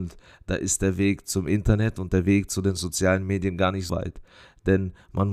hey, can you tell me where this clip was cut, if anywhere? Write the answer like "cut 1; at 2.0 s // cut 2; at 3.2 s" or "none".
cut 1; at 3.9 s